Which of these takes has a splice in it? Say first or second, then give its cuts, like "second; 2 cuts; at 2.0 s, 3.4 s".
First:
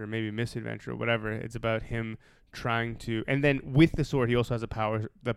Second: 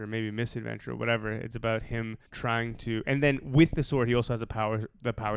second; 1 cut; at 2.3 s